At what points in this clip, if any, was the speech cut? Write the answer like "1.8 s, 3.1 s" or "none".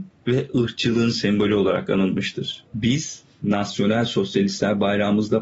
none